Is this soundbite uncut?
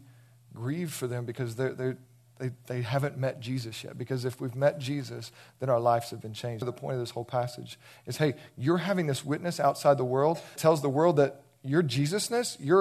no; 2 cuts; at 6.6 s, 10.6 s

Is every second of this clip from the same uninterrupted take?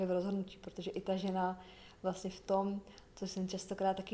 yes; 0 cuts

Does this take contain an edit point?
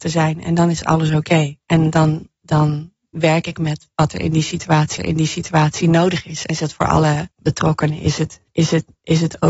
yes; 5 cuts; at 1.6 s, 5.0 s, 6.5 s, 7.3 s, 8.5 s

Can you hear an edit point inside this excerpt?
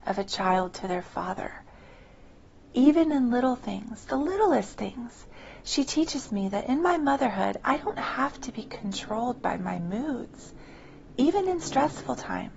no; 0 cuts

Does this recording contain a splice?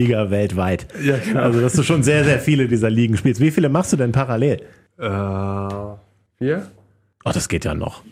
no; 0 cuts

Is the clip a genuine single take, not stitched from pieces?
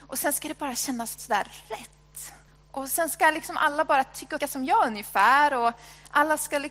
no; 3 cuts; at 1.2 s, 2.5 s, 4.4 s

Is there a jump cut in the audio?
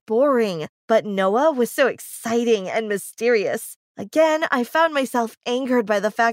no; 0 cuts

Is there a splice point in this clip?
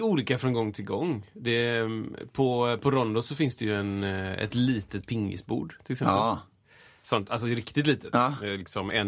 no; 0 cuts

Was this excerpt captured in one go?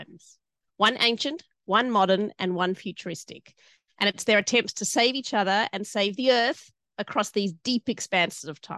yes; 0 cuts

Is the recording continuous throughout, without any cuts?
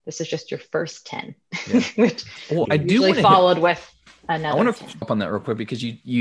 no; 2 cuts; at 2.6 s, 5.0 s

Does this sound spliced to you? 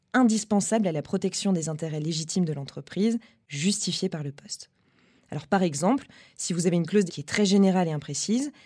yes; 1 cut; at 7.1 s

